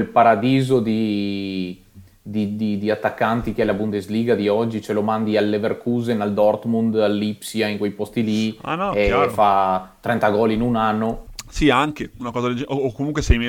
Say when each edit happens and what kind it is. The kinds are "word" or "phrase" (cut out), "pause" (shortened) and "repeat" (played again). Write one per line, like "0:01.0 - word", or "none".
none